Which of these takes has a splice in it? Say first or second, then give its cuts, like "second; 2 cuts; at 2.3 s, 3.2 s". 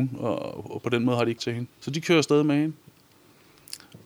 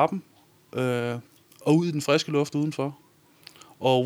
first; 2 cuts; at 1.4 s, 1.7 s